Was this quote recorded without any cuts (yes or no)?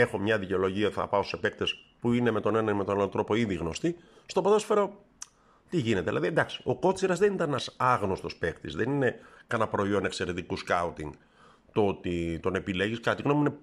yes